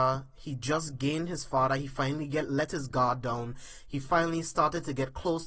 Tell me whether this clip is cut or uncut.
uncut